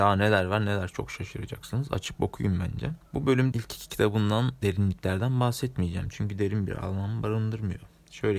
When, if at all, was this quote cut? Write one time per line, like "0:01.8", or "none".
0:03.1
0:03.5
0:04.6